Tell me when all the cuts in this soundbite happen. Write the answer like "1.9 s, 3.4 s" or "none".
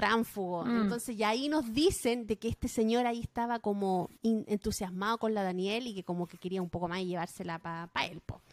4.1 s